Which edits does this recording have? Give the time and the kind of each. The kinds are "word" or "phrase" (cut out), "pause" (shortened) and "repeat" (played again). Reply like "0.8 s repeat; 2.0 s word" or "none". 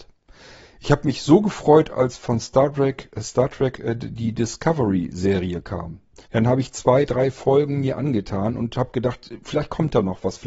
6.3 s pause